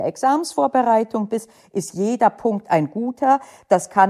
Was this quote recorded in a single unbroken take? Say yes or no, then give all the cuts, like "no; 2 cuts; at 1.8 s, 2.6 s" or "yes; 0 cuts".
yes; 0 cuts